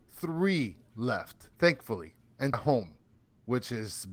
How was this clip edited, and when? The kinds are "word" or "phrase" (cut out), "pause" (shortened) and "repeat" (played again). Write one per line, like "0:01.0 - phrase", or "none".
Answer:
0:01.5 - pause
0:02.5 - word